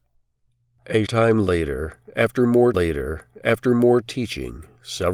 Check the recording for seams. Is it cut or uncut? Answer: cut